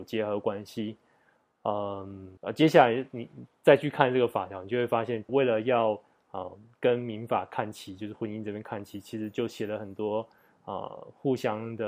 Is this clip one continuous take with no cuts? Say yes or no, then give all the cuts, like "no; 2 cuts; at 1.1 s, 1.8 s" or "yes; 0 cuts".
no; 2 cuts; at 2.4 s, 5.3 s